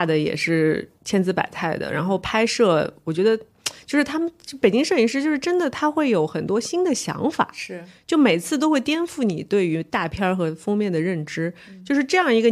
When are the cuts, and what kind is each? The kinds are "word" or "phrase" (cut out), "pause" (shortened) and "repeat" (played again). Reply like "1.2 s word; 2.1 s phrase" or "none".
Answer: 1.0 s pause